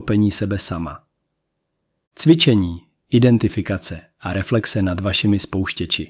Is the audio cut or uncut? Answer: uncut